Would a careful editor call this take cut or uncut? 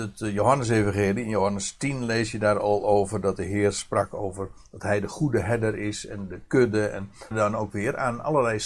cut